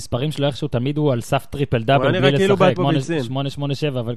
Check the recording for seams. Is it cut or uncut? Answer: cut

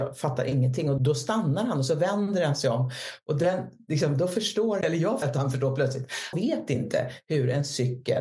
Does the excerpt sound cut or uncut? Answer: cut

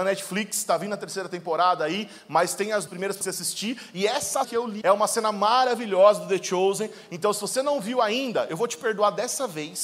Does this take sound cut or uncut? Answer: cut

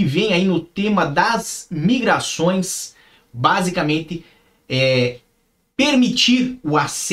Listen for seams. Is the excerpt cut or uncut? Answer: uncut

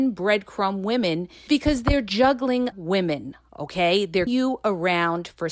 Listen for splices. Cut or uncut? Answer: cut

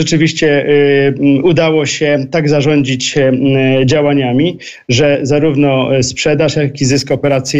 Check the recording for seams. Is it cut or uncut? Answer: uncut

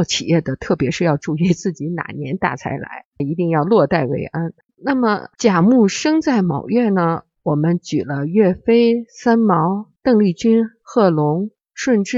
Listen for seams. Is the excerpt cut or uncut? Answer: cut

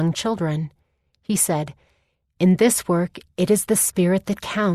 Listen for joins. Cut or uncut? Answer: uncut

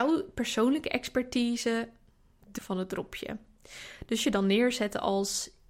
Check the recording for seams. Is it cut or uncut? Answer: cut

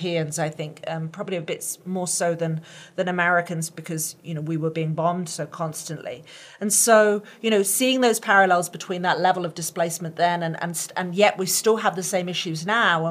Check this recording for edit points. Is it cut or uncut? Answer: uncut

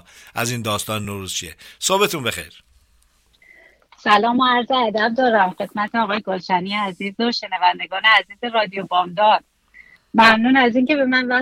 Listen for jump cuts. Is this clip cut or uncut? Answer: uncut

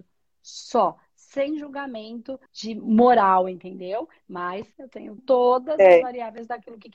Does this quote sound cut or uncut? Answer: cut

